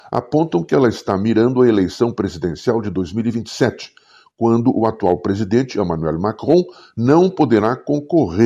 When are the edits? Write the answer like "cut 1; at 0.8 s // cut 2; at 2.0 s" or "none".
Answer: none

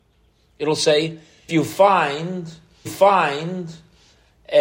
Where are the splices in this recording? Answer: cut 1; at 1.5 s // cut 2; at 2.9 s

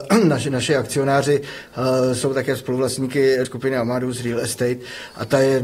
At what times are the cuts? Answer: cut 1; at 3.4 s

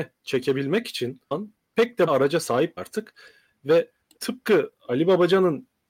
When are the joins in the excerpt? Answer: cut 1; at 1.3 s // cut 2; at 2.1 s // cut 3; at 2.8 s // cut 4; at 4.2 s

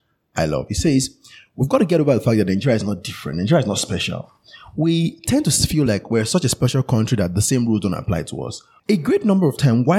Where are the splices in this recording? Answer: none

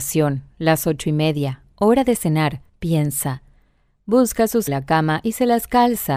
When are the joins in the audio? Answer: cut 1; at 2.7 s // cut 2; at 4.7 s

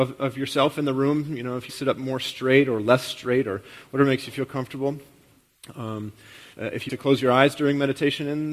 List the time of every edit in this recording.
cut 1; at 1.7 s // cut 2; at 6.5 s // cut 3; at 6.9 s

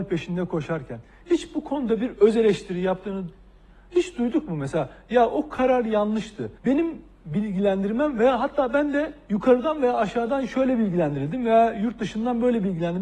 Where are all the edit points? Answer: cut 1; at 6.6 s

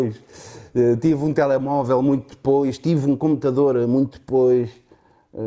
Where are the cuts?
none

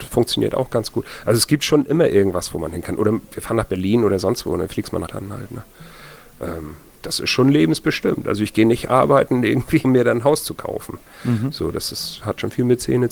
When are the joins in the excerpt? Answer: cut 1; at 5.1 s // cut 2; at 9.8 s

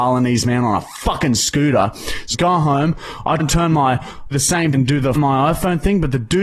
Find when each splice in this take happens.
cut 1; at 2.3 s // cut 2; at 3.4 s // cut 3; at 4.3 s // cut 4; at 4.7 s // cut 5; at 5.1 s

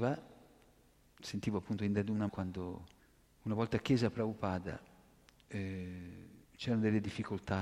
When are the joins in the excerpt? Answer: cut 1; at 2.3 s // cut 2; at 3.0 s // cut 3; at 6.4 s

